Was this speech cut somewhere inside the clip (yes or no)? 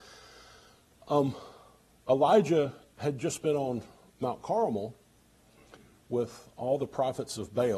no